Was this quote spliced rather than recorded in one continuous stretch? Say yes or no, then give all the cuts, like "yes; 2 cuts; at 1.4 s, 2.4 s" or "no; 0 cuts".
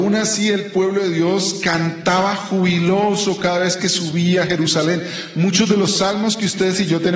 no; 0 cuts